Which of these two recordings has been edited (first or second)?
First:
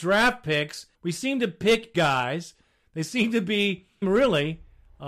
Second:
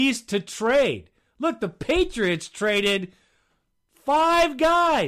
first